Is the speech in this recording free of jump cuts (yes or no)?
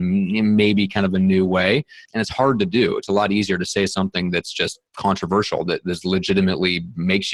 no